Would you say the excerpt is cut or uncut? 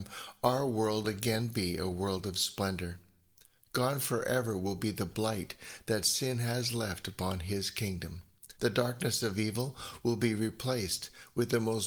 cut